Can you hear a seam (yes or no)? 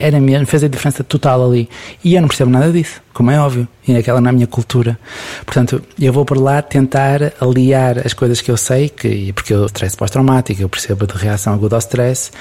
yes